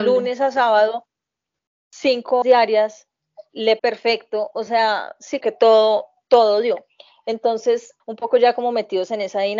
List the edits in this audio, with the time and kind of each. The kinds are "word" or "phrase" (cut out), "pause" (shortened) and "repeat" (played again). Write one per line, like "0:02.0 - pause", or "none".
0:02.4 - word
0:03.8 - word
0:05.4 - word
0:08.0 - word

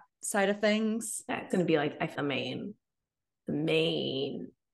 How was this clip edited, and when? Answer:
0:01.5 - word
0:02.2 - word

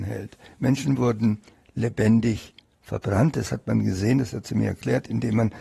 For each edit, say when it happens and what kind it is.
none

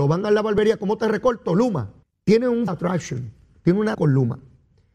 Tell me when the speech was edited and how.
0:02.0 - pause
0:02.7 - word
0:03.9 - phrase

